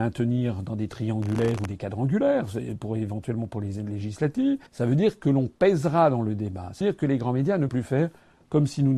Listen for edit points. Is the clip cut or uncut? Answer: cut